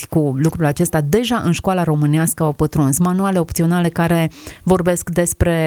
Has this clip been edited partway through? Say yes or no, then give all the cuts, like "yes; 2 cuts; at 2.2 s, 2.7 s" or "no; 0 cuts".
no; 0 cuts